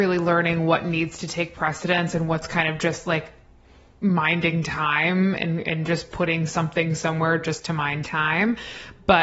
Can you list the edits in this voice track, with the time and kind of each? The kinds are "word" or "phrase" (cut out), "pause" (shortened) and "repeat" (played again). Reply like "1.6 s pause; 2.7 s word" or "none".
none